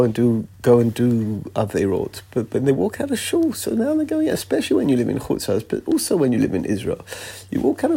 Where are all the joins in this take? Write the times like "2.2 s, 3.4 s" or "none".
none